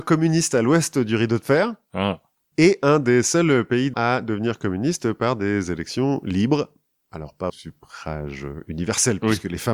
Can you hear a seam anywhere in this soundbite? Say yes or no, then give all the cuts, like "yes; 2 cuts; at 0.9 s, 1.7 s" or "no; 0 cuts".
yes; 2 cuts; at 3.9 s, 7.5 s